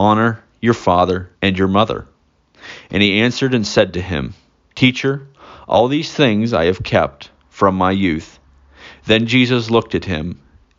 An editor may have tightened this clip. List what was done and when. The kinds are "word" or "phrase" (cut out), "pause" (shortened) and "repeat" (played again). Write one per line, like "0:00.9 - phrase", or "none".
0:01.3 - pause

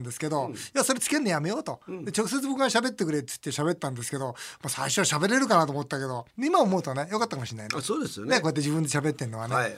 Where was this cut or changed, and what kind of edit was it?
0:06.3 - pause

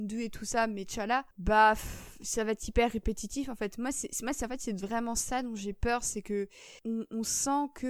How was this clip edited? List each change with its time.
0:01.3 - pause
0:06.8 - pause

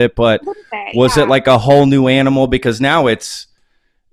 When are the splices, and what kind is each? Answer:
none

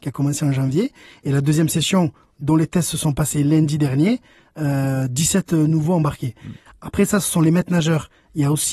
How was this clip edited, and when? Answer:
none

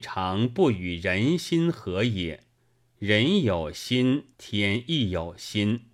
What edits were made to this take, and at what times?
0:02.6 - pause
0:04.3 - pause

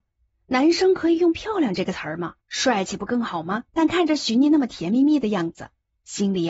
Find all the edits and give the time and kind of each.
0:02.4 - pause
0:03.7 - pause

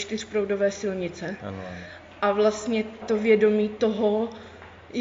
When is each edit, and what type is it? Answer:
0:03.0 - word

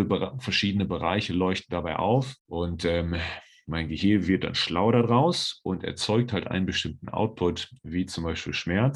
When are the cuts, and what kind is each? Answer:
none

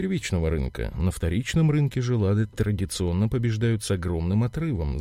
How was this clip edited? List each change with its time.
none

